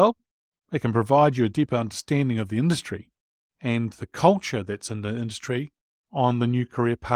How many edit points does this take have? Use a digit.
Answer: 0